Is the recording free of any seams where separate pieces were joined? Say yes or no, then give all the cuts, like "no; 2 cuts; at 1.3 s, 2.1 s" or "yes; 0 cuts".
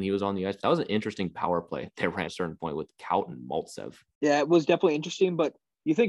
no; 2 cuts; at 2.3 s, 4.1 s